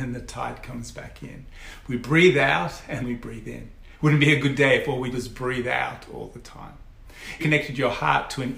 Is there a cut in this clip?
yes; 3 cuts; at 3.0 s, 5.1 s, 7.4 s

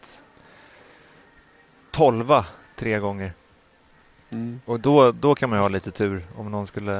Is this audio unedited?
yes; 0 cuts

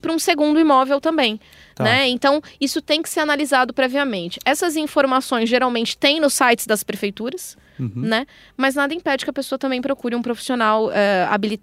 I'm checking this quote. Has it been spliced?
no; 0 cuts

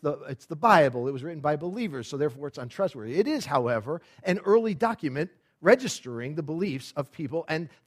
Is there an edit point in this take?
no; 0 cuts

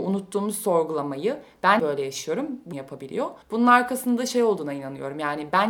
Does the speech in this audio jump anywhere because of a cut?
yes; 3 cuts; at 1.8 s, 2.7 s, 3.4 s

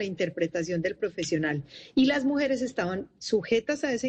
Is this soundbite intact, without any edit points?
yes; 0 cuts

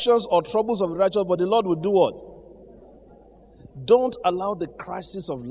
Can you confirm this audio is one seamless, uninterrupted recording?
yes; 0 cuts

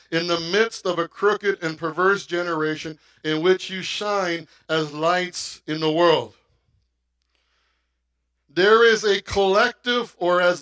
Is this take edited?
no; 0 cuts

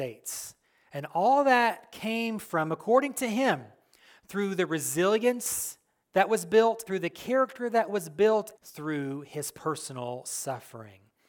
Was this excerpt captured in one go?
no; 2 cuts; at 6.9 s, 8.6 s

